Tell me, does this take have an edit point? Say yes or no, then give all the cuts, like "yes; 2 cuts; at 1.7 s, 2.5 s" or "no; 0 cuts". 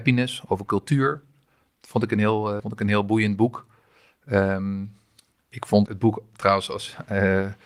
yes; 2 cuts; at 2.6 s, 5.9 s